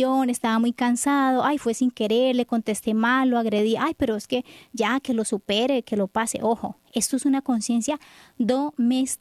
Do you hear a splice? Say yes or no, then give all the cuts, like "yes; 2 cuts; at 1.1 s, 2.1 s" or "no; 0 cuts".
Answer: no; 0 cuts